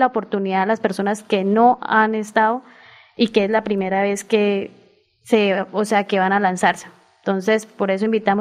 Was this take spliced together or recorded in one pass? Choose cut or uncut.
uncut